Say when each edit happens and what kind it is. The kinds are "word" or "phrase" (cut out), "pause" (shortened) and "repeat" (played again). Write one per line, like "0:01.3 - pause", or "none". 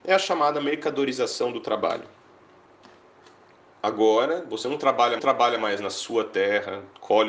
0:05.2 - repeat

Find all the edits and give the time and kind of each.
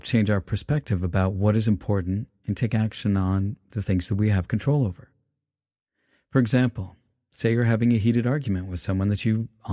none

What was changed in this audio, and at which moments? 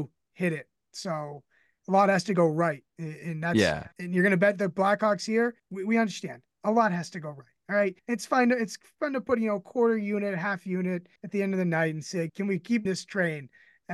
0:02.9 - pause
0:03.9 - pause
0:05.6 - pause
0:08.0 - pause
0:11.2 - pause
0:12.3 - phrase
0:12.8 - word

